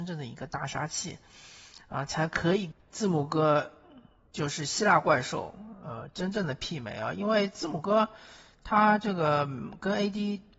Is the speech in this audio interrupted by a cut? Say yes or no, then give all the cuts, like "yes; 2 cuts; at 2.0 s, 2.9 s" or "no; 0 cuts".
no; 0 cuts